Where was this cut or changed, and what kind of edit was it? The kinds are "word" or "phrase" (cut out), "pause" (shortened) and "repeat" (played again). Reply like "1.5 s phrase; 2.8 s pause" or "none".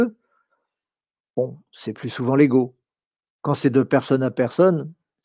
none